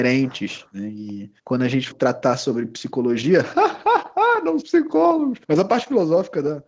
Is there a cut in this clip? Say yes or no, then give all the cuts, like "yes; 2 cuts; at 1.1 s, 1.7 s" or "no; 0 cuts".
yes; 4 cuts; at 1.4 s, 1.9 s, 4.6 s, 5.4 s